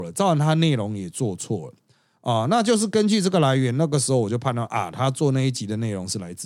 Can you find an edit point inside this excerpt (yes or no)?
no